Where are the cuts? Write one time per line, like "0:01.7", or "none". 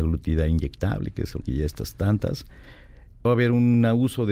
0:01.4
0:03.3